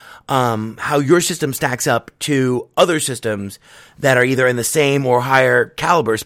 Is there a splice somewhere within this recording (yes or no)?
no